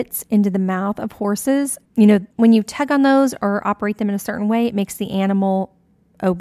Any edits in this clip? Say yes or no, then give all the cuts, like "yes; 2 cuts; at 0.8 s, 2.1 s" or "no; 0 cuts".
yes; 2 cuts; at 1.9 s, 2.3 s